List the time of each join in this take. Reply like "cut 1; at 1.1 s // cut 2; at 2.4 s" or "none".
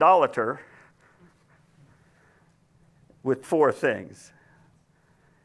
cut 1; at 3.4 s